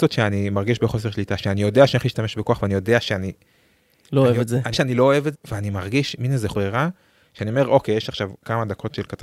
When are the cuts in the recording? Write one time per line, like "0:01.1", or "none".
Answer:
0:04.7
0:05.3
0:06.5